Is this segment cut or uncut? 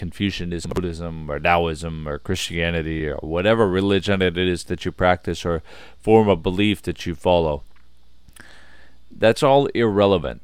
uncut